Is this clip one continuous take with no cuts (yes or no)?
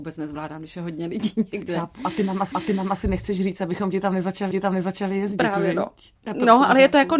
no